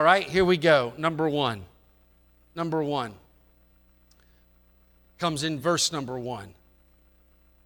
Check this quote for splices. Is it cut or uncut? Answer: uncut